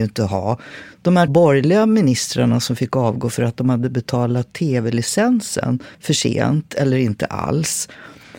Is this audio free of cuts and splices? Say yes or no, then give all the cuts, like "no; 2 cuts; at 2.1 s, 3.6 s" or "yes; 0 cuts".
no; 2 cuts; at 1.3 s, 5.9 s